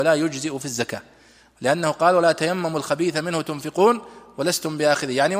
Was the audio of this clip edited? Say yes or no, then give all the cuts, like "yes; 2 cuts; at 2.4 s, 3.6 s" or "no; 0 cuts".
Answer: no; 0 cuts